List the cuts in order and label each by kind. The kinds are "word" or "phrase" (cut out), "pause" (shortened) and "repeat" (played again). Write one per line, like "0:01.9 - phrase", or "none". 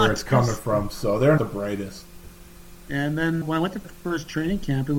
0:01.4 - word
0:03.4 - word
0:03.8 - word

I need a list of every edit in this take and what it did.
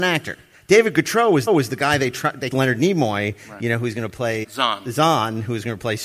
0:01.5 - repeat
0:02.5 - phrase
0:04.4 - word

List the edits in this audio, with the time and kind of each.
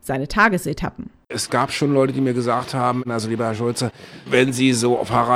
none

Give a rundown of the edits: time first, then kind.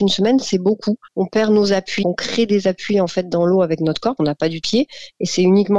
0:01.1 - pause
0:02.0 - word
0:04.2 - word
0:04.6 - word

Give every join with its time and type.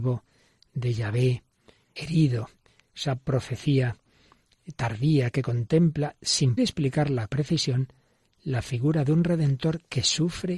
0:02.0 - word
0:06.6 - word
0:07.3 - word

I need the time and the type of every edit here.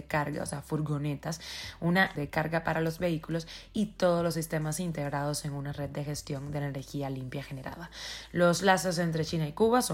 0:02.2 - word

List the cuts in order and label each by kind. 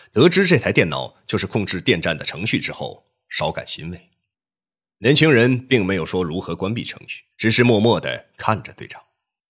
0:04.3 - pause
0:07.3 - pause

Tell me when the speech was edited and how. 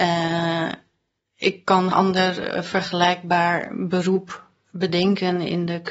0:01.9 - word

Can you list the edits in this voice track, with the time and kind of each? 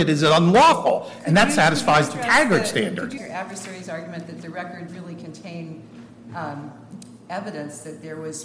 0:03.2 - word
0:04.9 - word

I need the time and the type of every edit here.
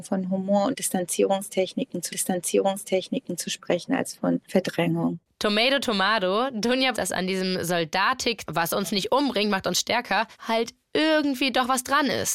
0:02.1 - repeat
0:04.4 - pause
0:06.9 - phrase
0:08.5 - word
0:10.3 - pause

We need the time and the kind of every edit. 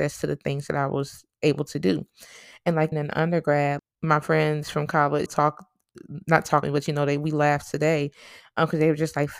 0:02.9 - word
0:03.8 - word
0:05.3 - word
0:06.6 - word

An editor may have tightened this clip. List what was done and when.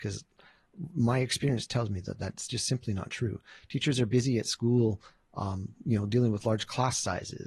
none

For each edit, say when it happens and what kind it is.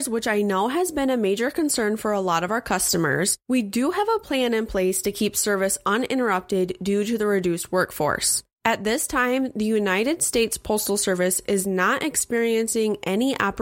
none

